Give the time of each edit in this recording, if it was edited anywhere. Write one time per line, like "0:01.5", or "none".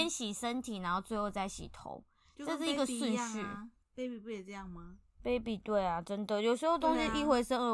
0:03.8